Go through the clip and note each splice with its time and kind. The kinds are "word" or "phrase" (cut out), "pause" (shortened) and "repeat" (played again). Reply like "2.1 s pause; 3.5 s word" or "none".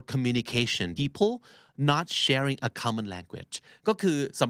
1.0 s word

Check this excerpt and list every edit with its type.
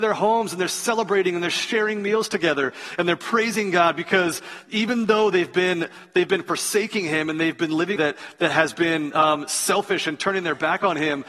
8.0 s phrase

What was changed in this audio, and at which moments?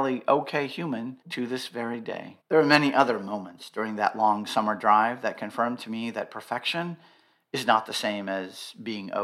1.2 s pause; 2.4 s pause

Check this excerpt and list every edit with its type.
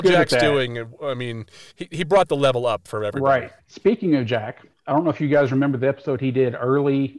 1.7 s pause; 3.6 s pause

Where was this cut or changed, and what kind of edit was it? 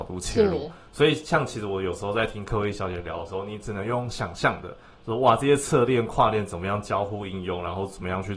none

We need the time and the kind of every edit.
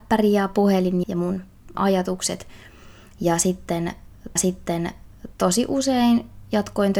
1.0 s word; 1.7 s word; 4.4 s repeat

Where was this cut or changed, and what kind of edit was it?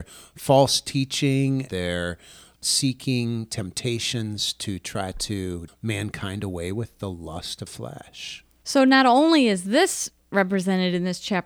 1.7 s word; 5.7 s word; 7.7 s word

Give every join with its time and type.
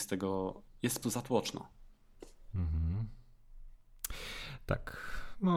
1.0 s word

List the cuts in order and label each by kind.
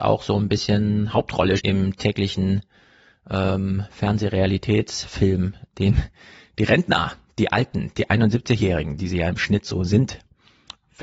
1.6 s word

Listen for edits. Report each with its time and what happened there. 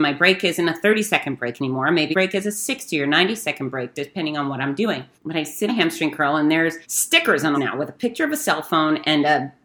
2.1 s word; 5.1 s pause; 5.7 s word; 6.8 s pause; 7.5 s phrase

